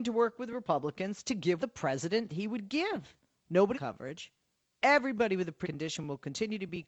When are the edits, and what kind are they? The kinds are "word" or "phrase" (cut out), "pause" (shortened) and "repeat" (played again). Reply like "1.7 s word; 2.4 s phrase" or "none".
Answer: 1.6 s word; 2.3 s word; 3.7 s word; 5.6 s word